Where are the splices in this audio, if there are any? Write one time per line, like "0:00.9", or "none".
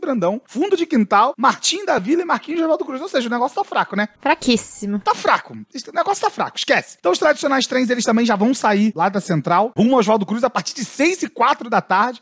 none